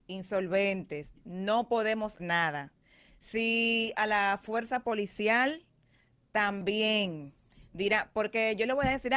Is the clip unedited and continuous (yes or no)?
no